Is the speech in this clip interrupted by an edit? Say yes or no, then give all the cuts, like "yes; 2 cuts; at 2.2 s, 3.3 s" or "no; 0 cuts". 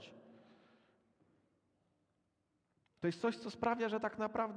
no; 0 cuts